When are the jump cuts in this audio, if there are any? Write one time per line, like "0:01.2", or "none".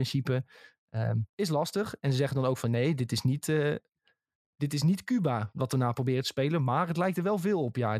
0:01.3